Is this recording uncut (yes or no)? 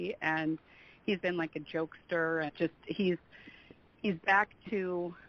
no